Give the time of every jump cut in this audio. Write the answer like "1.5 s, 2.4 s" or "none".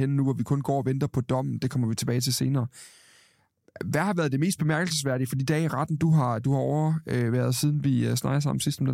none